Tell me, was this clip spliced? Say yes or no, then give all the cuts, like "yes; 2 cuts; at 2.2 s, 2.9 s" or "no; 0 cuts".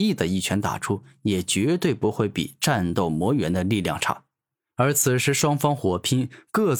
yes; 1 cut; at 4.5 s